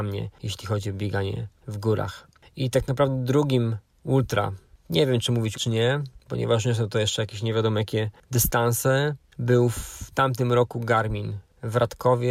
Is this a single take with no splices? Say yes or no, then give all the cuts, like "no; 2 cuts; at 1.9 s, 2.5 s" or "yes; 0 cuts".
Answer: no; 1 cut; at 5.5 s